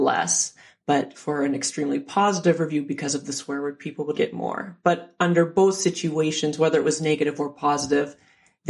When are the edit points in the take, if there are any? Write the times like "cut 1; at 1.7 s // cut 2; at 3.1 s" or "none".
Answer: cut 1; at 4.1 s